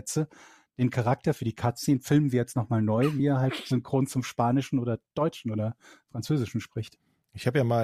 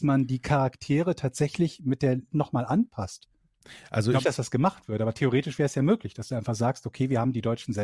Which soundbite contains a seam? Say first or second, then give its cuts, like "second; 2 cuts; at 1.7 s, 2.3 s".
second; 2 cuts; at 2.3 s, 4.2 s